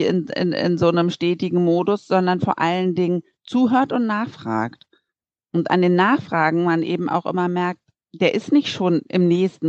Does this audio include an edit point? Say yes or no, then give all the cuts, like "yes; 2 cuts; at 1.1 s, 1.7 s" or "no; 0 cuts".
no; 0 cuts